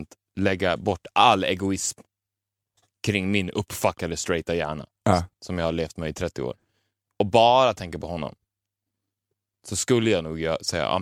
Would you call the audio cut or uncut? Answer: uncut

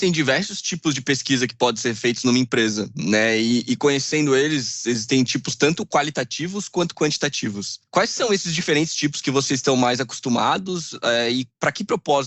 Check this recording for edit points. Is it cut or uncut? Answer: uncut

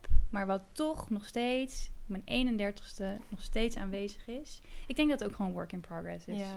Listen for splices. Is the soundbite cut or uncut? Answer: uncut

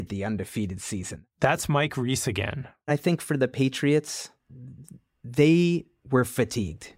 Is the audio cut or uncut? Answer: uncut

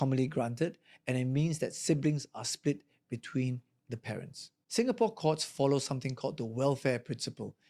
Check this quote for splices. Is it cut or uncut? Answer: uncut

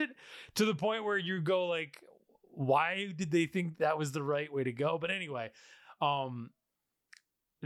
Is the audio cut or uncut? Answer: uncut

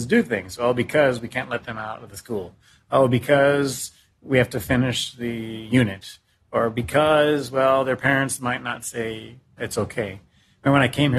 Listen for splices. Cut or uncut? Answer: cut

